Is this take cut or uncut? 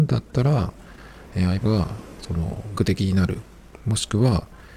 cut